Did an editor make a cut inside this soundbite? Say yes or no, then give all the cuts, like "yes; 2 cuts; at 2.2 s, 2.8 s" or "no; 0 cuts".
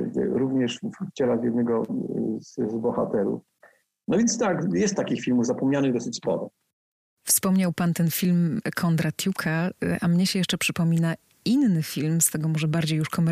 no; 0 cuts